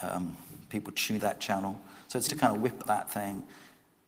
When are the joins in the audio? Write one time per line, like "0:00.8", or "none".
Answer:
0:01.2
0:02.3
0:02.8